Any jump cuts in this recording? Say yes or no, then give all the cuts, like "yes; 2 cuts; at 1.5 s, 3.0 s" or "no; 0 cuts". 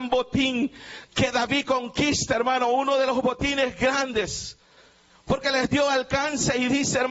no; 0 cuts